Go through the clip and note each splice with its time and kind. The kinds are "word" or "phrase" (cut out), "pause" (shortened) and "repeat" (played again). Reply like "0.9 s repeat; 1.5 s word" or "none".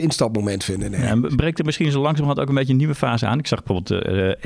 none